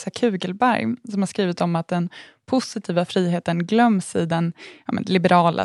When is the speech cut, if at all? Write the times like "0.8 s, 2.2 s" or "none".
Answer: none